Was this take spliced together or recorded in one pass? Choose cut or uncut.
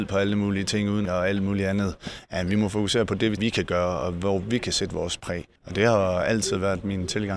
cut